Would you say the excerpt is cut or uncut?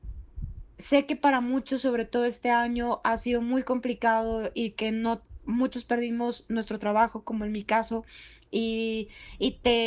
uncut